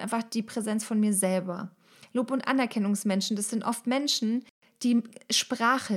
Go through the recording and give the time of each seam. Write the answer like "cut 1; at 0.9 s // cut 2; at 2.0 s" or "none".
none